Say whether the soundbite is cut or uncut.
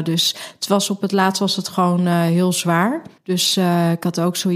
cut